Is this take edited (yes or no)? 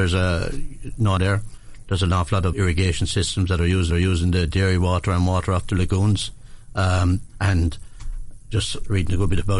yes